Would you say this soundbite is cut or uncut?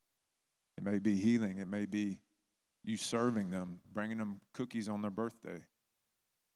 cut